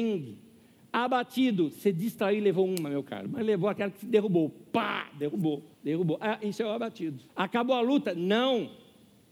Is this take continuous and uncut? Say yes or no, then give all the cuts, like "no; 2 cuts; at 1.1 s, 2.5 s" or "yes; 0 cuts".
no; 2 cuts; at 5.7 s, 7.3 s